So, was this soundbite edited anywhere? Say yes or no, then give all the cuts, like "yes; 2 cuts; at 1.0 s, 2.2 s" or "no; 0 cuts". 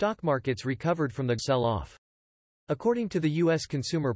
yes; 1 cut; at 1.4 s